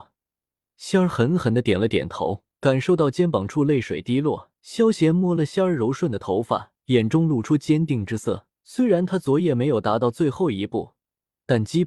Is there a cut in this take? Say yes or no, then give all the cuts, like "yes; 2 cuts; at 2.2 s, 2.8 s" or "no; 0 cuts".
yes; 4 cuts; at 2.5 s, 4.6 s, 6.8 s, 8.6 s